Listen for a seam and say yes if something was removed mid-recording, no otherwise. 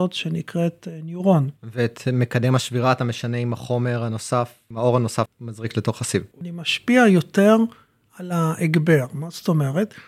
yes